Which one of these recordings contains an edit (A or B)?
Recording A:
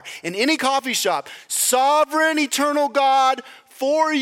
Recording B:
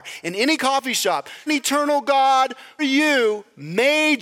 B